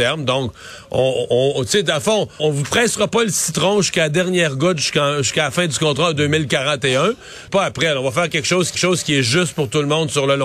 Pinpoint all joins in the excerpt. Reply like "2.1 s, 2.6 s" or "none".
2.4 s, 7.5 s, 8.7 s